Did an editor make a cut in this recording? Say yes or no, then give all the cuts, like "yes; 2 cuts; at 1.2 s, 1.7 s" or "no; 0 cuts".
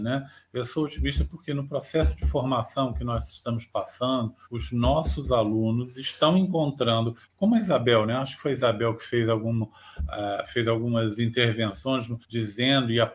yes; 3 cuts; at 4.4 s, 7.2 s, 12.2 s